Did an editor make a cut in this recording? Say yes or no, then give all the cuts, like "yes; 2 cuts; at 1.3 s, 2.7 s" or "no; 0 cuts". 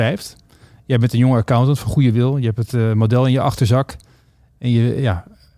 no; 0 cuts